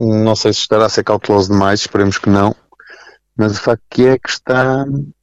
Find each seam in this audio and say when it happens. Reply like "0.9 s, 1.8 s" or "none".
none